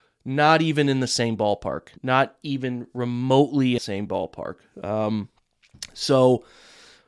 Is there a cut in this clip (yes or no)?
yes